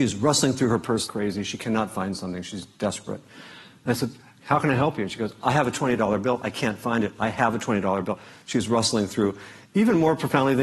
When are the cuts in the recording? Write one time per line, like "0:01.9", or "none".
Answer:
0:01.1